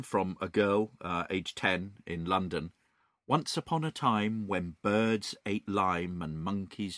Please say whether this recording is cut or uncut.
uncut